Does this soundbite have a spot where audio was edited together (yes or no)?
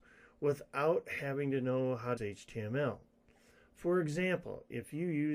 yes